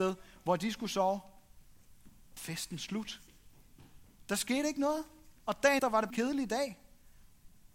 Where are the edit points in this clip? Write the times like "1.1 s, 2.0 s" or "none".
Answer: 2.4 s, 5.4 s, 5.8 s, 6.1 s